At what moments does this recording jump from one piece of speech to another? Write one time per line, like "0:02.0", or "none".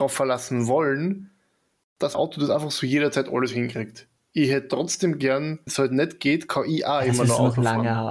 0:02.1
0:05.7